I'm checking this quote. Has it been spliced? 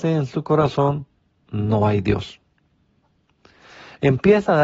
no; 0 cuts

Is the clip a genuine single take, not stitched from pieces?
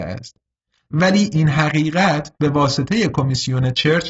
no; 1 cut; at 2.4 s

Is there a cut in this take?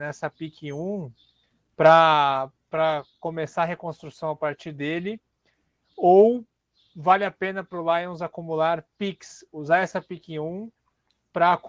no; 0 cuts

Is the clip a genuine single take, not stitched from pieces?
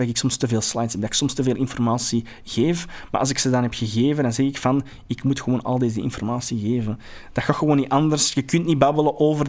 yes; 0 cuts

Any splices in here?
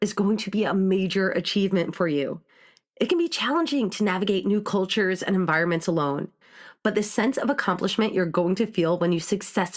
no; 0 cuts

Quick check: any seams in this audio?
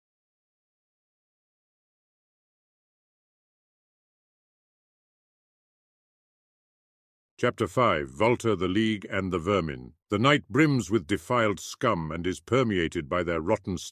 yes; 1 cut; at 10.0 s

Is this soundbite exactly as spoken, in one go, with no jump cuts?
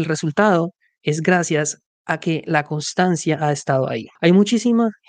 no; 1 cut; at 4.1 s

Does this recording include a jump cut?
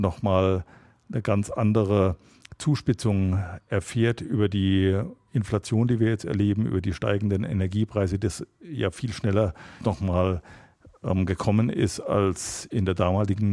yes; 1 cut; at 9.8 s

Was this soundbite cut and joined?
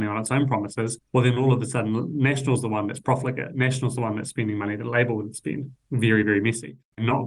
no; 0 cuts

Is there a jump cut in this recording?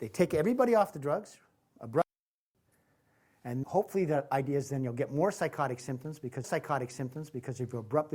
yes; 2 cuts; at 3.6 s, 6.4 s

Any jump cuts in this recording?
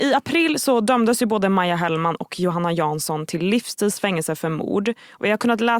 no; 0 cuts

